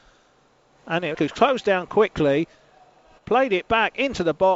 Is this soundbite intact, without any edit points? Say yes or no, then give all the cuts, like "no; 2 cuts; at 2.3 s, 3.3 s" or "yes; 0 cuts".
no; 1 cut; at 1.1 s